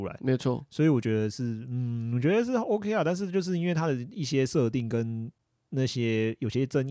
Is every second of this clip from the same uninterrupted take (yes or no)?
yes